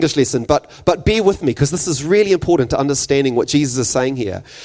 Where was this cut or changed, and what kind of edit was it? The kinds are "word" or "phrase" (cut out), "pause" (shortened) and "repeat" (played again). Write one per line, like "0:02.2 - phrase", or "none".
none

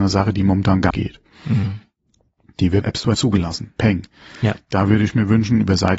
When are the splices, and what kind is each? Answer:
0:00.9 - word
0:02.8 - word
0:03.1 - word

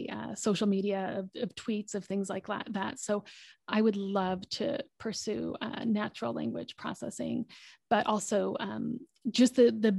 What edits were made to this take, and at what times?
none

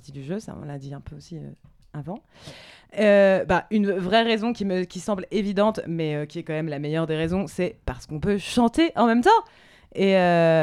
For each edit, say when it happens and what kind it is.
none

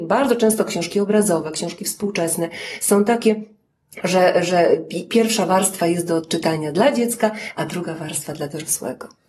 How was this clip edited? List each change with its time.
none

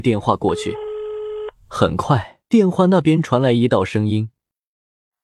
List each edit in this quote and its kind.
0:02.4 - pause

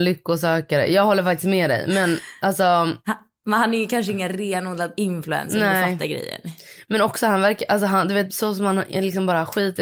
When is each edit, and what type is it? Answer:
none

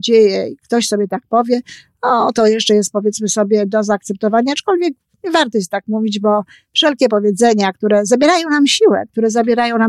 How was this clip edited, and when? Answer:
none

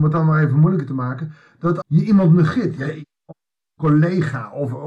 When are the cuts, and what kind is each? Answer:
0:01.8 - word

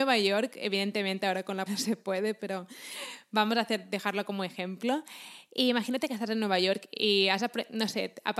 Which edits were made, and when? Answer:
0:01.7 - word

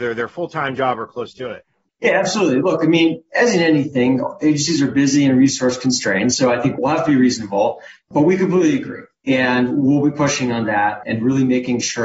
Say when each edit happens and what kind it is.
none

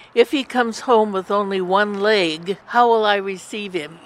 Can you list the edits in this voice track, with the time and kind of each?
0:02.6 - pause

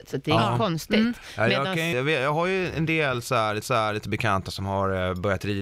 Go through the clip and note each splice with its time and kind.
0:01.9 - word
0:03.6 - repeat

